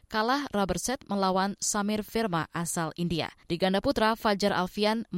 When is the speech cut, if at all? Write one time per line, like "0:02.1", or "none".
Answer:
0:03.4